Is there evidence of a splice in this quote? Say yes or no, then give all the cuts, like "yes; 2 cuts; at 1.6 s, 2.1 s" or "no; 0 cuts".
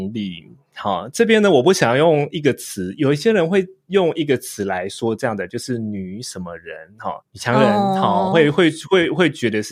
yes; 1 cut; at 7.2 s